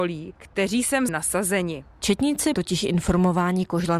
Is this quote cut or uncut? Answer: cut